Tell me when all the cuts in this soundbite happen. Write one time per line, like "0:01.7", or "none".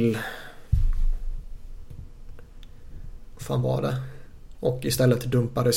0:03.3